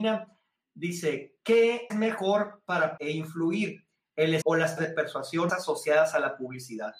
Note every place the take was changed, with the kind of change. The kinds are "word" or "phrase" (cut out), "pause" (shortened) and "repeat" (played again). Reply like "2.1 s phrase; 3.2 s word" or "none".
1.9 s word; 3.0 s word; 4.4 s word; 4.8 s word; 5.5 s word